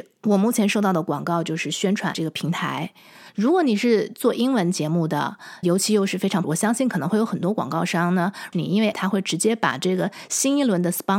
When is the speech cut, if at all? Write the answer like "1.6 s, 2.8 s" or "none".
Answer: 2.1 s, 5.6 s, 6.4 s, 8.5 s, 8.9 s